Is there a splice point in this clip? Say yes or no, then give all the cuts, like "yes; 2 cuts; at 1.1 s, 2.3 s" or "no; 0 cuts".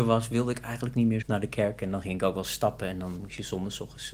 yes; 1 cut; at 1.2 s